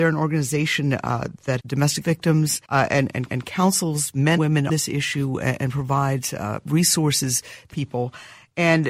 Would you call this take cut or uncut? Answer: cut